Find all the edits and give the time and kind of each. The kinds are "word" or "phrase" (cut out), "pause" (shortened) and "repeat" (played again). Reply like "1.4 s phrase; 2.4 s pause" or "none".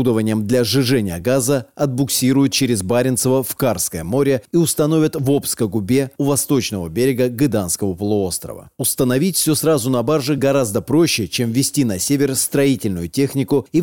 none